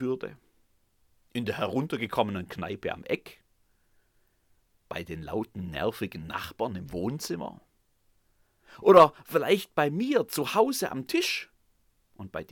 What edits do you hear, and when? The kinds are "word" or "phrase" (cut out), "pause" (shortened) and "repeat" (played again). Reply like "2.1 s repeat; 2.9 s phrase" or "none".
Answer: none